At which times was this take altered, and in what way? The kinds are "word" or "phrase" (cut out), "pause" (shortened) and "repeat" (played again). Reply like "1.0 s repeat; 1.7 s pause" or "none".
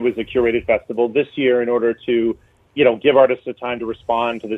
2.7 s word